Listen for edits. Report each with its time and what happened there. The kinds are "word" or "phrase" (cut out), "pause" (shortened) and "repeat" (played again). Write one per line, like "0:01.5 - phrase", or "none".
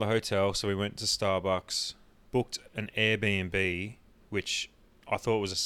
none